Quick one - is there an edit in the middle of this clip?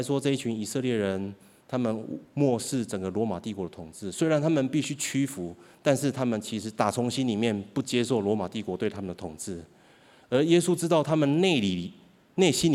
no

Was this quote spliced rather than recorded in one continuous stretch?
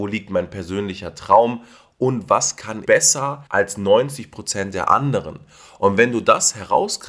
yes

